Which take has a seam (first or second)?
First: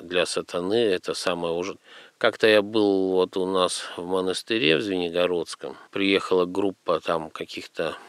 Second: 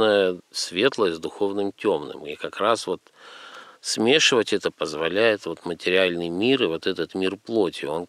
first